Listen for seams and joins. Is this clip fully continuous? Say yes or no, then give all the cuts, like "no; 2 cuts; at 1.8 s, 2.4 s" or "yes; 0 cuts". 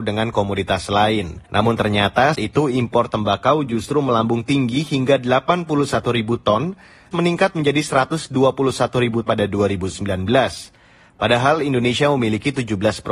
no; 4 cuts; at 1.4 s, 2.3 s, 7.1 s, 9.3 s